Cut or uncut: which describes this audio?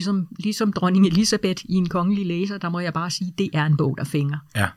uncut